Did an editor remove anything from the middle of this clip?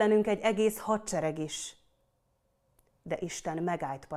no; 0 cuts

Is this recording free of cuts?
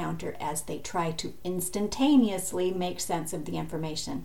yes; 0 cuts

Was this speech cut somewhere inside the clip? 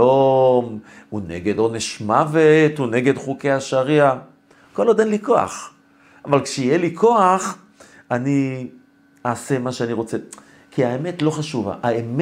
no; 0 cuts

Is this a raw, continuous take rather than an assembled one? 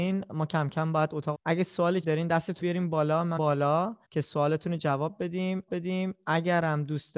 no; 6 cuts; at 1.3 s, 2.0 s, 2.6 s, 3.4 s, 4.0 s, 5.7 s

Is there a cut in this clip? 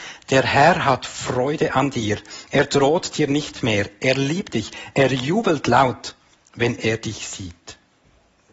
no; 0 cuts

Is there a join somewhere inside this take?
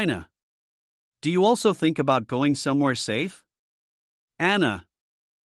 no; 0 cuts

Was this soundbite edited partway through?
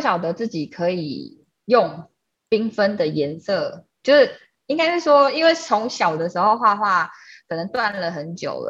no; 0 cuts

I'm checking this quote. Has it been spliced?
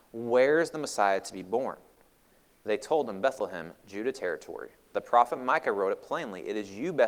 no; 0 cuts

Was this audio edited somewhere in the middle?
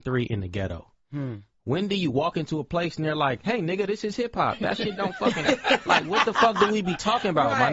no; 0 cuts

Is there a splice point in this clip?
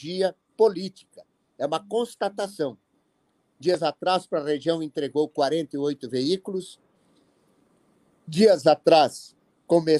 no; 0 cuts

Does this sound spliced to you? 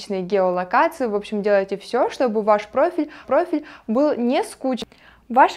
yes; 1 cut; at 3.2 s

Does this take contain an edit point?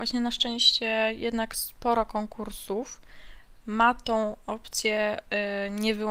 no; 0 cuts

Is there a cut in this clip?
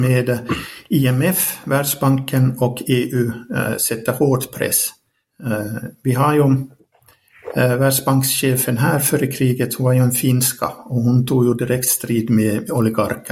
no; 0 cuts

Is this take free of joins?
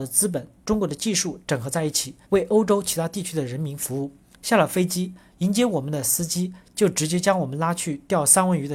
no; 2 cuts; at 2.2 s, 4.3 s

